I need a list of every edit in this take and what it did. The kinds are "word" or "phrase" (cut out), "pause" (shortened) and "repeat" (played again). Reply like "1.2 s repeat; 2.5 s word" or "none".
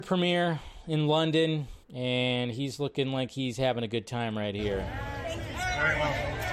1.8 s pause